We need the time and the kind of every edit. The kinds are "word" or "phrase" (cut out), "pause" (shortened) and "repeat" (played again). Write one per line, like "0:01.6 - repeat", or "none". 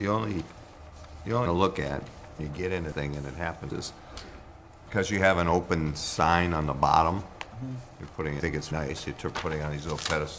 0:01.5 - word
0:02.4 - word
0:02.9 - word
0:03.7 - word
0:08.4 - word
0:08.7 - word